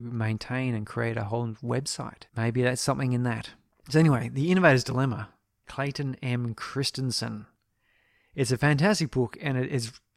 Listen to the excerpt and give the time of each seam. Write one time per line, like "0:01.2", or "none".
0:05.6